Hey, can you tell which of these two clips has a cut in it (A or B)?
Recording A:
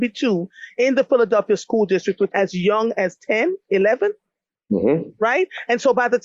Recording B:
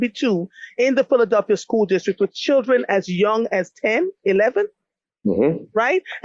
A